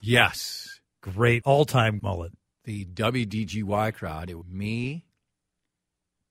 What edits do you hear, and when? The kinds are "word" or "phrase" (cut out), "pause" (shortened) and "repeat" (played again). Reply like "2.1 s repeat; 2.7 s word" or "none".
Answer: 1.4 s word; 2.0 s word; 4.4 s word